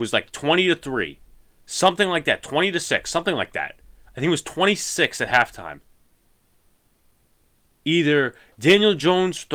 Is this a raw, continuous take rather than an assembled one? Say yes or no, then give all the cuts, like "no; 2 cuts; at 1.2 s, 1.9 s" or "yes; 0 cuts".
yes; 0 cuts